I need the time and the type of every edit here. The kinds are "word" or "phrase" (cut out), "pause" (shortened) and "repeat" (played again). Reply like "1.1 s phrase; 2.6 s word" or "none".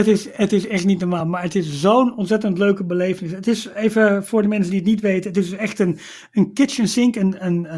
none